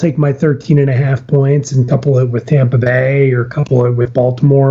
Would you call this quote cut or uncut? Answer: uncut